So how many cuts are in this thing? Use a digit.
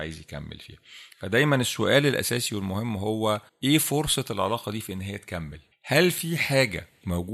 2